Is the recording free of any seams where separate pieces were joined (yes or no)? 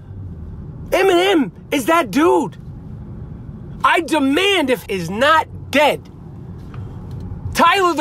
no